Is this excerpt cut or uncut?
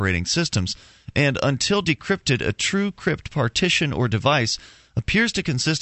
uncut